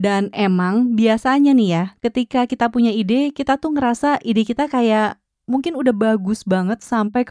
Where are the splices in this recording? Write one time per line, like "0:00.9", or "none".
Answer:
none